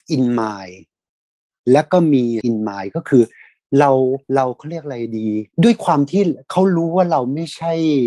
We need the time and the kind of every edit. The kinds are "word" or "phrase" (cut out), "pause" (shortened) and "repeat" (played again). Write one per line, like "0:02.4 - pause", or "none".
0:02.4 - word
0:04.2 - pause
0:05.5 - pause